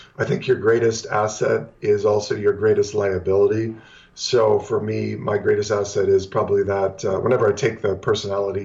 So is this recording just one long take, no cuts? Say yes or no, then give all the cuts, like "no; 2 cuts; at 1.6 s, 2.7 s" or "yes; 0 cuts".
yes; 0 cuts